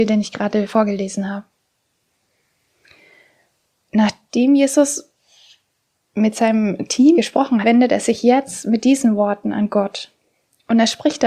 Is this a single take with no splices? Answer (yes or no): no